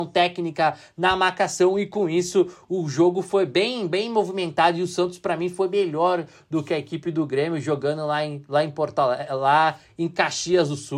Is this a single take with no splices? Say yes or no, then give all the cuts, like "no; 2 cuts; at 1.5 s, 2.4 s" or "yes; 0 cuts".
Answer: yes; 0 cuts